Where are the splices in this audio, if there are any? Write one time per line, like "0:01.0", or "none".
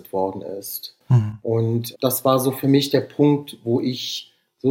0:01.9